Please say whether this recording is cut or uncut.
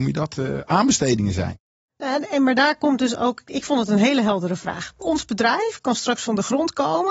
cut